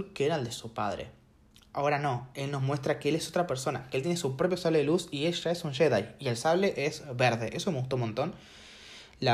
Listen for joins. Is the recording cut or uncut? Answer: uncut